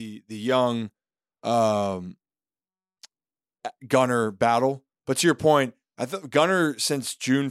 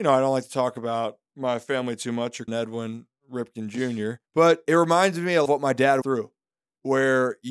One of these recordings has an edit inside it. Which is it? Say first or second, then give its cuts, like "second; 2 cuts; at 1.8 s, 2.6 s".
second; 4 cuts; at 2.5 s, 4.3 s, 5.5 s, 6.0 s